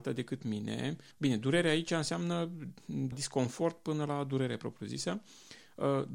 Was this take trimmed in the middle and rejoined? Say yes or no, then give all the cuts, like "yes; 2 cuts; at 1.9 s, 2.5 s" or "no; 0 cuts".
yes; 2 cuts; at 1.1 s, 3.1 s